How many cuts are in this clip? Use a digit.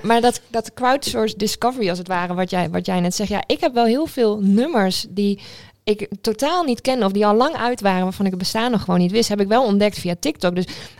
0